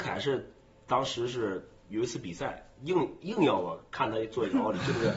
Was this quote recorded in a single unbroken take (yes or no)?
no